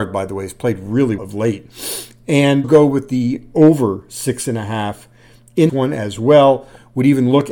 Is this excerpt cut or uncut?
cut